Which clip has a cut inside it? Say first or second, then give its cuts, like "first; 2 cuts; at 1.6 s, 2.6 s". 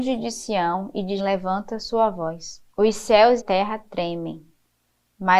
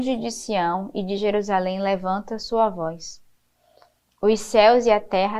first; 3 cuts; at 1.2 s, 2.7 s, 3.4 s